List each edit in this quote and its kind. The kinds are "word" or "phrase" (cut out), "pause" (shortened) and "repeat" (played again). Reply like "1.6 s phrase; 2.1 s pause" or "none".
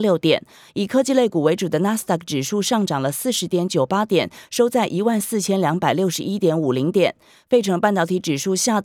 none